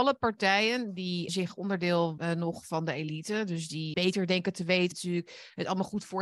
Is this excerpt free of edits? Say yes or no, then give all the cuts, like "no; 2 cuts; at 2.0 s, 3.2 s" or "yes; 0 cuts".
no; 4 cuts; at 1.3 s, 2.2 s, 3.9 s, 4.9 s